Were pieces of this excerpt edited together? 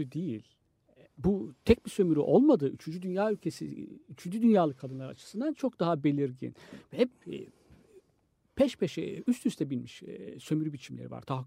no; 0 cuts

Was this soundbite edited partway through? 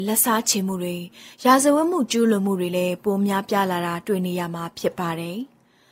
no; 0 cuts

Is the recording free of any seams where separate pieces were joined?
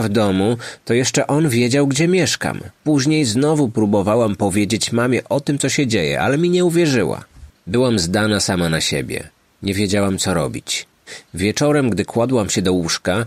no; 1 cut; at 2.8 s

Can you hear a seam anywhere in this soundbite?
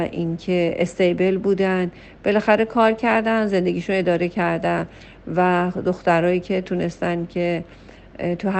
no; 0 cuts

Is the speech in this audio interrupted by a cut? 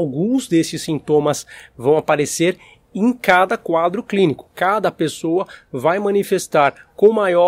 no; 0 cuts

